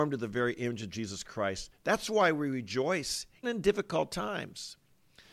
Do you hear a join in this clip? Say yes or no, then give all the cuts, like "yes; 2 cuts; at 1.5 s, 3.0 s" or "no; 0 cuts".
yes; 1 cut; at 3.4 s